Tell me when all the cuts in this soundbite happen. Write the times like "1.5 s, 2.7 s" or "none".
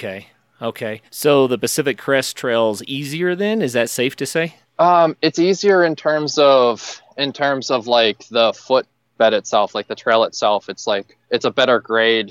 1.1 s, 4.6 s, 11.2 s